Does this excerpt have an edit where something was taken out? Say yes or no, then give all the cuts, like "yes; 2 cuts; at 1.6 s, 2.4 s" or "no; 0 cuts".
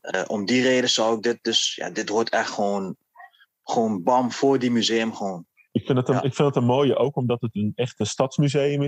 no; 0 cuts